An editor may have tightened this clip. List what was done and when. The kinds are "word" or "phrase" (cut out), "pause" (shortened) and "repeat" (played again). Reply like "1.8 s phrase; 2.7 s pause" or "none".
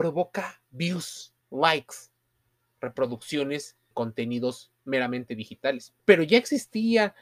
1.4 s pause; 3.9 s word; 4.8 s pause; 6.0 s pause